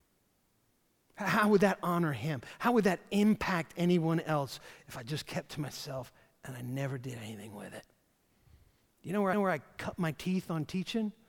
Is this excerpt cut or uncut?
cut